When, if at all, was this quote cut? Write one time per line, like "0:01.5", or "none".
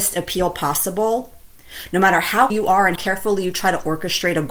0:02.5
0:02.9

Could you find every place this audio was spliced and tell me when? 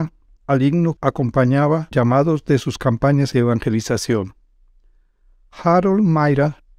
0:01.0
0:01.9
0:03.3

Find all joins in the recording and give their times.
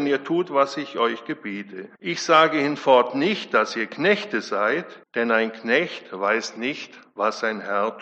0:01.9
0:05.0

